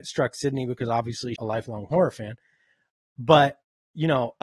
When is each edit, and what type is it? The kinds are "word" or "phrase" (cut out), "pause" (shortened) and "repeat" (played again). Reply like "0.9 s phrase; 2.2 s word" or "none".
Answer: 1.4 s word